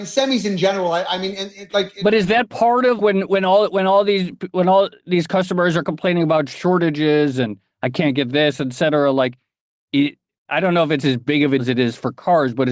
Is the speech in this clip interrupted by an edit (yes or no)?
yes